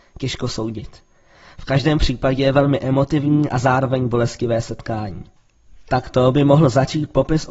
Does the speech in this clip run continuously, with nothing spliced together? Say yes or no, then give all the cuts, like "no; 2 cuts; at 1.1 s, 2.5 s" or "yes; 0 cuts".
yes; 0 cuts